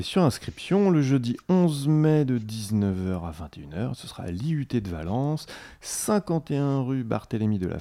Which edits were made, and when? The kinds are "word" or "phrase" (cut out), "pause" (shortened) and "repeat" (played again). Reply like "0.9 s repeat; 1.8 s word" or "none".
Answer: none